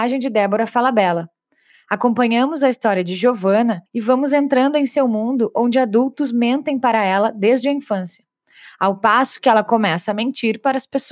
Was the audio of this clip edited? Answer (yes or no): yes